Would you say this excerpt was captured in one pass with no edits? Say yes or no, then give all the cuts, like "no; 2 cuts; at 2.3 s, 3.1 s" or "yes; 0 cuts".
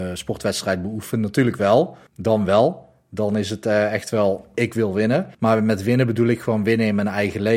no; 2 cuts; at 2.1 s, 5.3 s